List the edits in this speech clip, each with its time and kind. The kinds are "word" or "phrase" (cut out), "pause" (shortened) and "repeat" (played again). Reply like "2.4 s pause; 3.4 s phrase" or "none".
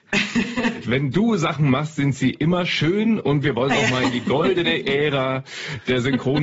none